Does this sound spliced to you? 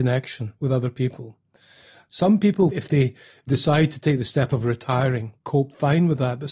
no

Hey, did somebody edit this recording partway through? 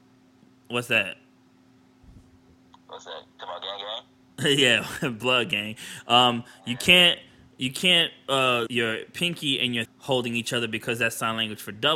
yes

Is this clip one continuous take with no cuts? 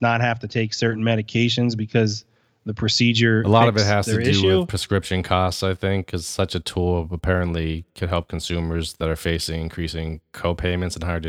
yes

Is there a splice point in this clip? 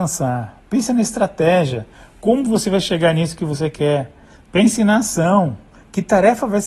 no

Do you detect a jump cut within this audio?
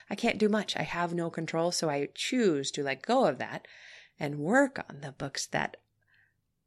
no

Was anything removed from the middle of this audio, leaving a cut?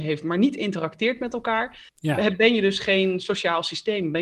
yes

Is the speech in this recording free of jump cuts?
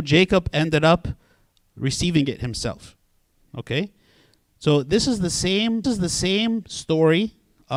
no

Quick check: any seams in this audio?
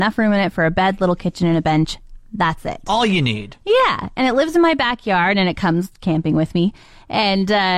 no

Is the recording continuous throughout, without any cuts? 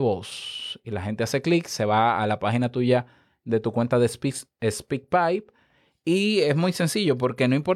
yes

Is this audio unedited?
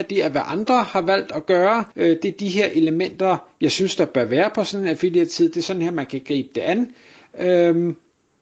no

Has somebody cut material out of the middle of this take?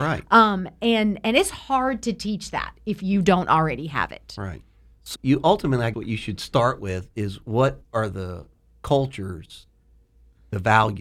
yes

